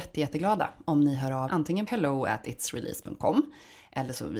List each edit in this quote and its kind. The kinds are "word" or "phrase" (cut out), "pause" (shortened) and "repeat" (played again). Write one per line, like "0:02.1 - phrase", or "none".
0:01.5 - word
0:01.9 - word